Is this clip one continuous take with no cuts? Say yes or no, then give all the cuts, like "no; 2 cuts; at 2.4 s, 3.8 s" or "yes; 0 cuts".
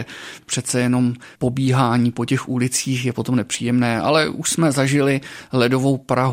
no; 1 cut; at 1.4 s